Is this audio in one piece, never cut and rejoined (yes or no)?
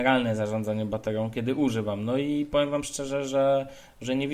yes